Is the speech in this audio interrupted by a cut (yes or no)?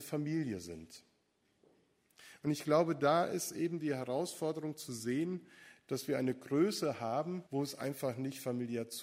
yes